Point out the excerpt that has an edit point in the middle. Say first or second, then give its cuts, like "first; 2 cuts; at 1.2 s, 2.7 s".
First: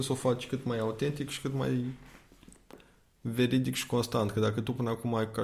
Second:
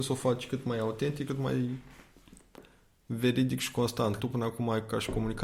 second; 2 cuts; at 1.3 s, 4.2 s